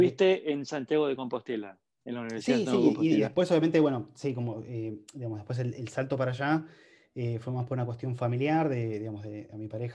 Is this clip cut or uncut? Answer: uncut